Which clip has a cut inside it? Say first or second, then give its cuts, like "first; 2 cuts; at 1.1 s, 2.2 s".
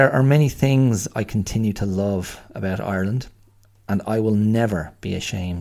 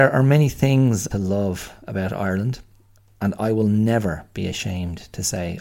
second; 1 cut; at 1.1 s